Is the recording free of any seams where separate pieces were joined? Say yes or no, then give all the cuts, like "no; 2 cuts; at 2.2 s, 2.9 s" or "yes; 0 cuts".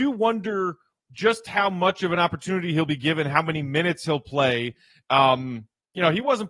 yes; 0 cuts